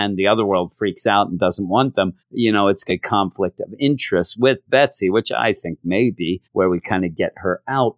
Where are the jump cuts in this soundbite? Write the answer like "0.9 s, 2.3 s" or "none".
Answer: 2.2 s, 2.9 s, 6.5 s